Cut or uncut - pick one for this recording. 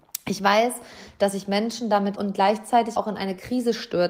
cut